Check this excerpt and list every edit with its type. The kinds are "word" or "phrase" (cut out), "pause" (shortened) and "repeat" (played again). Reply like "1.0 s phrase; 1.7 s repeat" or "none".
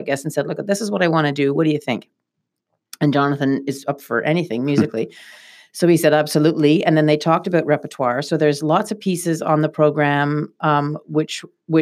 none